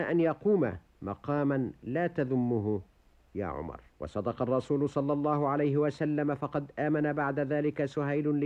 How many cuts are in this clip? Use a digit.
1